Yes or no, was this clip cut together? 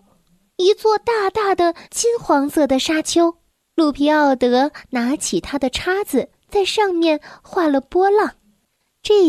yes